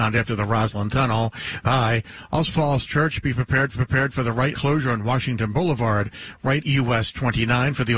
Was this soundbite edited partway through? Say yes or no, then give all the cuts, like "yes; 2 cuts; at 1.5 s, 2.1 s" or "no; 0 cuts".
yes; 5 cuts; at 1.6 s, 2.5 s, 3.8 s, 4.6 s, 6.6 s